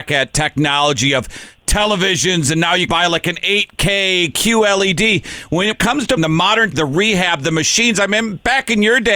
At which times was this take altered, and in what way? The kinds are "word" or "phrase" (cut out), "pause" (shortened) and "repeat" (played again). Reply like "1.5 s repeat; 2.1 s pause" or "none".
2.9 s word; 5.7 s word; 6.2 s word; 6.7 s word